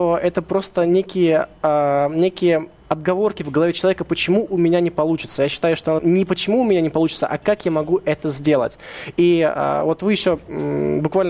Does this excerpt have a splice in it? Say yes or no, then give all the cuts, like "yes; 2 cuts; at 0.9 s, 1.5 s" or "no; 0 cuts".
yes; 1 cut; at 6.0 s